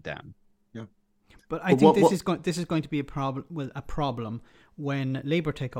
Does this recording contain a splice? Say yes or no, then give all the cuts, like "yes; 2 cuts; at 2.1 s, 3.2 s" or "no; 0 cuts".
no; 0 cuts